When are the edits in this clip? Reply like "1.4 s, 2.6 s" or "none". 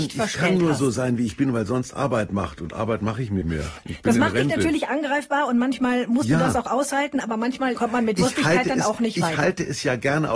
3.4 s, 7.8 s